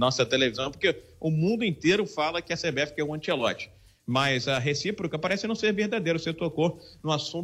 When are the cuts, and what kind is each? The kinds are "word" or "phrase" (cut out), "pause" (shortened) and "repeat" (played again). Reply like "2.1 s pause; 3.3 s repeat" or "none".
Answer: none